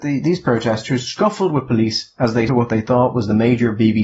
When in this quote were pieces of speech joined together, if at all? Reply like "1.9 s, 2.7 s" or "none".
2.5 s